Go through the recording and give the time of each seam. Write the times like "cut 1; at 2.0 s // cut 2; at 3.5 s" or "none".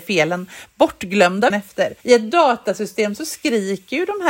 cut 1; at 1.5 s // cut 2; at 2.0 s